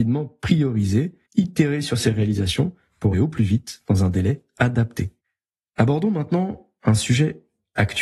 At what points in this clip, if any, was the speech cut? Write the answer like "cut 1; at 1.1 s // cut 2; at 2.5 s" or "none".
cut 1; at 1.3 s // cut 2; at 3.1 s